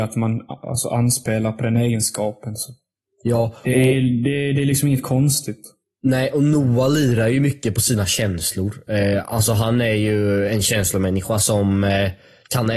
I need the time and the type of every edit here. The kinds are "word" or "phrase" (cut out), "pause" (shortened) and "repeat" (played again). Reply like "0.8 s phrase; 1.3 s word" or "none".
none